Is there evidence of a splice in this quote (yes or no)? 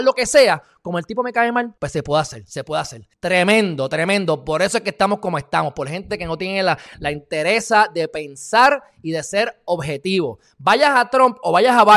yes